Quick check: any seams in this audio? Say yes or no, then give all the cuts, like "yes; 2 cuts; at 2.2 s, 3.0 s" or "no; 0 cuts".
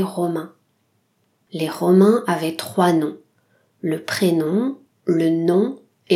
no; 0 cuts